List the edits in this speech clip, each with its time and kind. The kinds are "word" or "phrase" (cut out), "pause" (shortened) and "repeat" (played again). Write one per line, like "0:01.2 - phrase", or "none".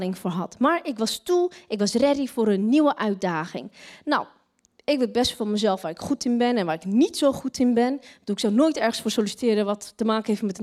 none